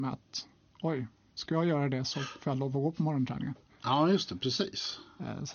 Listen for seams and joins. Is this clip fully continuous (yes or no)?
yes